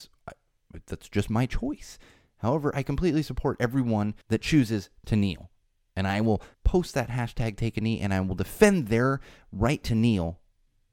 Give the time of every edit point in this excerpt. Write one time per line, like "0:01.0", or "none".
0:04.2
0:06.5